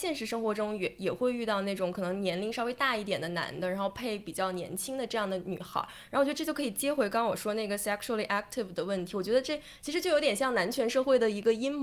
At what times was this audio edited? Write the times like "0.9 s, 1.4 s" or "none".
none